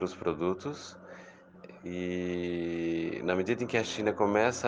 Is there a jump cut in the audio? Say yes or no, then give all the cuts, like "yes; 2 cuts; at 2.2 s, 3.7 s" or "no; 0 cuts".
no; 0 cuts